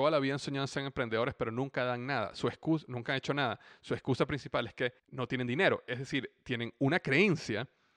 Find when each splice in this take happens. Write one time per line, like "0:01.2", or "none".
0:05.0

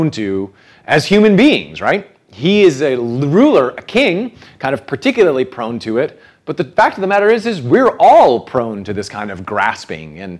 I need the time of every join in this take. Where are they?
none

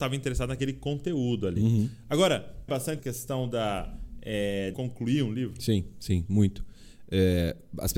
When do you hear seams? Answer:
0:02.7
0:03.0
0:04.7
0:06.3

